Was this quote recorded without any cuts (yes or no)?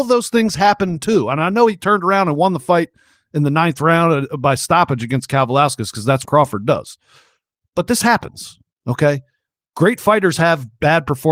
no